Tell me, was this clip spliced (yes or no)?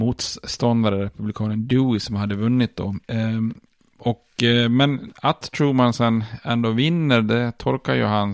no